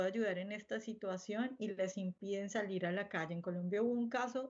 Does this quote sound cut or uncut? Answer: uncut